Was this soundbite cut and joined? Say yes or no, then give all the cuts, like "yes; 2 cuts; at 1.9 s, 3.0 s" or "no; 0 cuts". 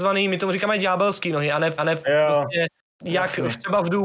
yes; 2 cuts; at 1.8 s, 2.9 s